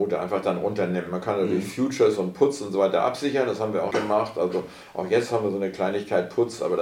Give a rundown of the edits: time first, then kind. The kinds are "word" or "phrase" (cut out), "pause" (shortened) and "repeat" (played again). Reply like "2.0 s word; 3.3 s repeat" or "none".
3.9 s phrase